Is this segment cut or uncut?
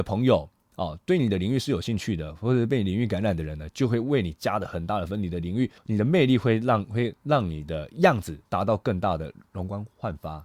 cut